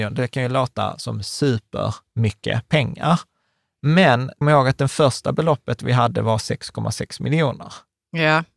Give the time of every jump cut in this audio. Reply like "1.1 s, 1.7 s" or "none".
4.4 s